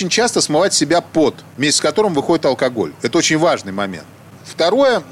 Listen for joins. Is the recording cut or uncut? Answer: uncut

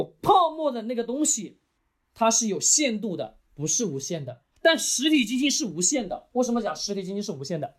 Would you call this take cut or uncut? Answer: cut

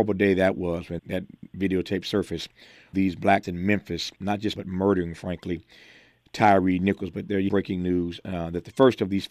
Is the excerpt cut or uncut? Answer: cut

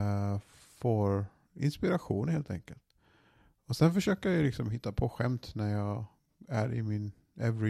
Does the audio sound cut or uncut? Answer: uncut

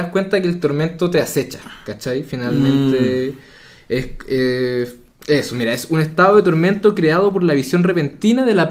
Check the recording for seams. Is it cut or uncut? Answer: uncut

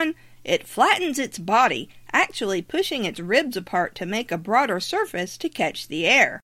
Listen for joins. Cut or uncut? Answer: uncut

